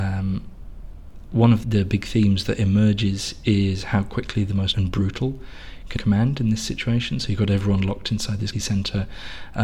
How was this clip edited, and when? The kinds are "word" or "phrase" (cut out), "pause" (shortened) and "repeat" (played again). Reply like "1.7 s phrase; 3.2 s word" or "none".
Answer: 1.6 s word; 4.7 s word; 6.0 s word; 8.5 s word